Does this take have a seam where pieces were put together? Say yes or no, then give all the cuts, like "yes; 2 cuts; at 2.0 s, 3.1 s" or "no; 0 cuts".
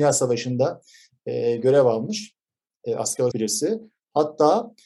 yes; 1 cut; at 3.3 s